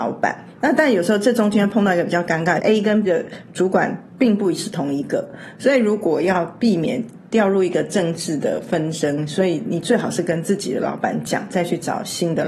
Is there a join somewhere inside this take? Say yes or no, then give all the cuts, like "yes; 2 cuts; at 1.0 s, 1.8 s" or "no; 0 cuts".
yes; 3 cuts; at 2.6 s, 3.1 s, 4.1 s